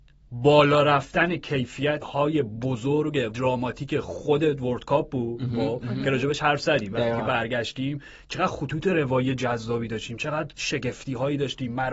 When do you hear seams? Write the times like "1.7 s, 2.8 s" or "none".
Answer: 2.0 s, 3.3 s